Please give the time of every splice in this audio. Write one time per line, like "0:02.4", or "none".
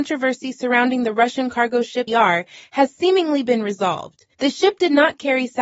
0:02.1
0:04.3